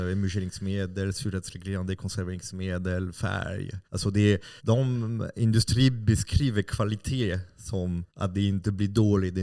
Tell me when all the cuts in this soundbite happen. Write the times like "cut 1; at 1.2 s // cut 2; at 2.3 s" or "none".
cut 1; at 3.8 s // cut 2; at 4.6 s // cut 3; at 8.1 s